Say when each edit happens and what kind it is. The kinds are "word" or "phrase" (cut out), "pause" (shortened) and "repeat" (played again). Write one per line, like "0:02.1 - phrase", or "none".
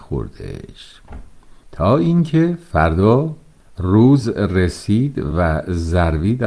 none